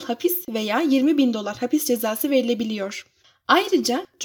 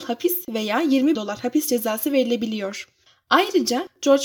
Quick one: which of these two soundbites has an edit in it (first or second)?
second